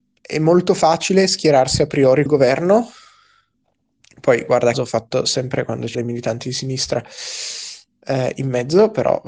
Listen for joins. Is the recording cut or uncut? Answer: cut